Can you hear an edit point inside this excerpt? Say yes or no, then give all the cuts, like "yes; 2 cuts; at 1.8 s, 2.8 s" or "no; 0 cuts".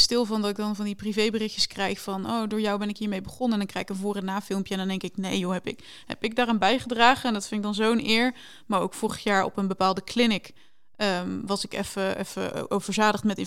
no; 0 cuts